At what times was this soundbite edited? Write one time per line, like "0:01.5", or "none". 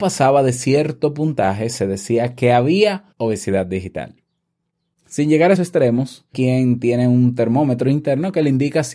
0:03.1
0:05.6
0:06.3